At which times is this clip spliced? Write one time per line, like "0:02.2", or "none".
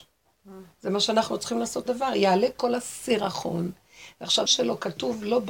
0:01.9
0:04.5